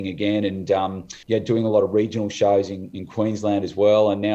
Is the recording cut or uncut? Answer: cut